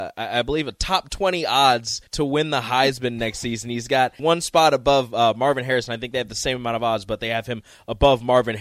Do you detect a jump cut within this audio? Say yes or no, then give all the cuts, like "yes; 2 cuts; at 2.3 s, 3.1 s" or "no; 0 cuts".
yes; 2 cuts; at 2.1 s, 4.2 s